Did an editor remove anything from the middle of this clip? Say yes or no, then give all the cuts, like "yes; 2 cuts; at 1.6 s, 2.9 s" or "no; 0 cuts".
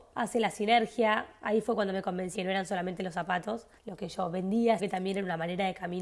yes; 3 cuts; at 2.3 s, 3.8 s, 4.8 s